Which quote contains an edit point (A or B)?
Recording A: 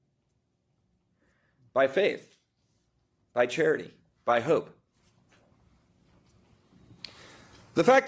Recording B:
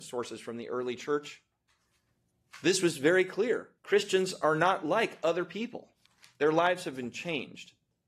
B